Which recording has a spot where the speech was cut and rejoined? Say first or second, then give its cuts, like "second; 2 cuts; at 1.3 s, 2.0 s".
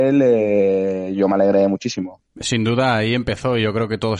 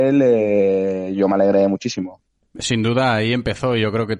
first; 1 cut; at 2.3 s